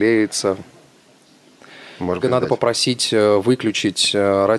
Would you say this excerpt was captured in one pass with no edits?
no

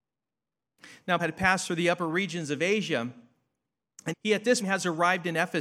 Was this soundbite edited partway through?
yes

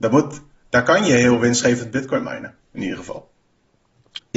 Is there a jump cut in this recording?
yes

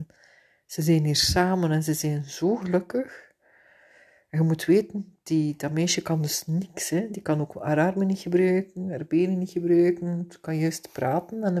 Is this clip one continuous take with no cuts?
yes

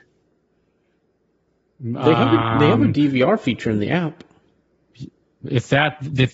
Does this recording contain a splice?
no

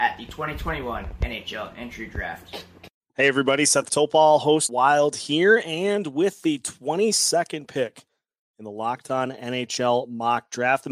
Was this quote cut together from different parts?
yes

